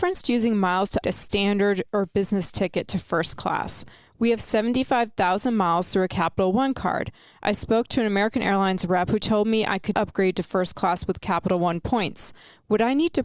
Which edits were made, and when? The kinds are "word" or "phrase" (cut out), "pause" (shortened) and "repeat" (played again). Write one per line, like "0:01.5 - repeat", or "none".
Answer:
0:01.0 - word
0:09.9 - word